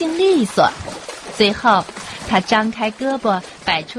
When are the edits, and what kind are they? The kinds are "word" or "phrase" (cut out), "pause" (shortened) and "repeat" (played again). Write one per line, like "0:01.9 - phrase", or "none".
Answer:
none